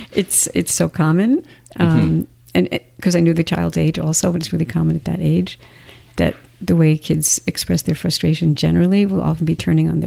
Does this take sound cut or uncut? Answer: uncut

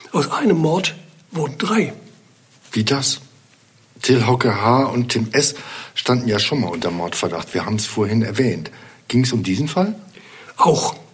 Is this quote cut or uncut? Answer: uncut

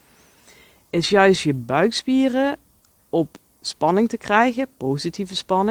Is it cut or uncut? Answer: uncut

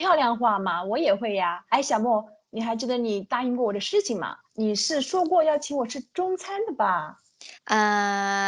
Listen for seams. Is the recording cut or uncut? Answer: cut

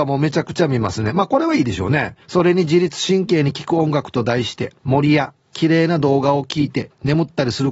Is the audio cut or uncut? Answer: cut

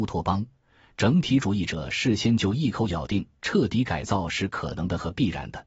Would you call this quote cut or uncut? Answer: uncut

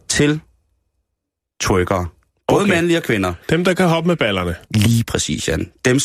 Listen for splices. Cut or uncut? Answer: cut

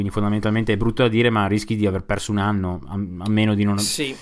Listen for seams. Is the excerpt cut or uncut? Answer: uncut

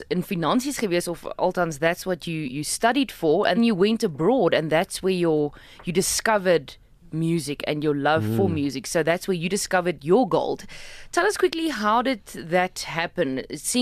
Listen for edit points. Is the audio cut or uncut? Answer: cut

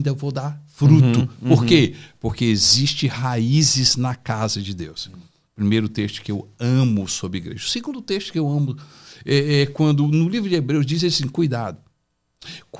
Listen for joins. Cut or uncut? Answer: uncut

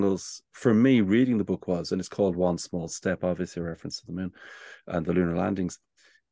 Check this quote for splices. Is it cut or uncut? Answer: uncut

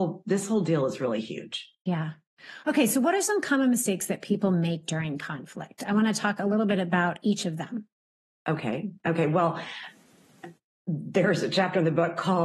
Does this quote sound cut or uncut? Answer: uncut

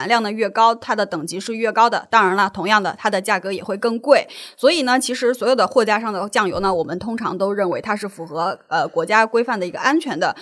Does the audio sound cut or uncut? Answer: uncut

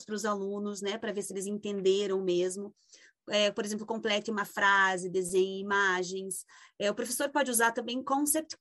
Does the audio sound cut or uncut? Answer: uncut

